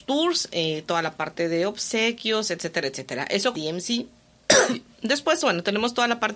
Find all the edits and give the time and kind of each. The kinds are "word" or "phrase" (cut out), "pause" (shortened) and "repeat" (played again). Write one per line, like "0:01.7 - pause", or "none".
0:03.5 - phrase